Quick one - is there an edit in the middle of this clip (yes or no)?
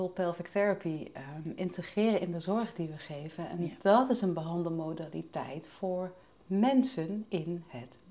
no